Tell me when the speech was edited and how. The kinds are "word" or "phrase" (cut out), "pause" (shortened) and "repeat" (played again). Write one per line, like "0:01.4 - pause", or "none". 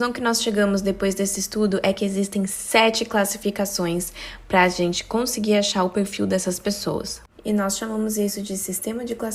none